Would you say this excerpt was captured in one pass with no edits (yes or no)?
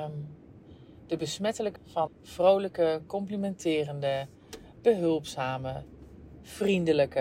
no